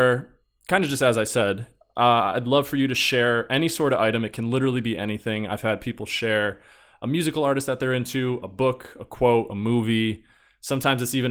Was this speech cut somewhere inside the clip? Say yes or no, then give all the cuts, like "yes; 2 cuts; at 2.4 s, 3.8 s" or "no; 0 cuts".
no; 0 cuts